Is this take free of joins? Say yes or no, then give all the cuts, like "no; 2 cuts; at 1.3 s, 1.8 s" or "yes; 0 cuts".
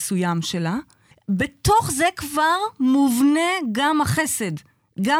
no; 1 cut; at 1.1 s